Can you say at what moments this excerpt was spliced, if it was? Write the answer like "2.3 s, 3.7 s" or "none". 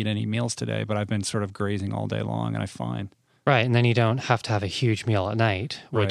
2.7 s